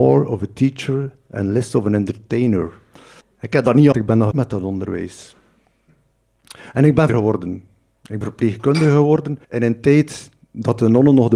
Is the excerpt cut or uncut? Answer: cut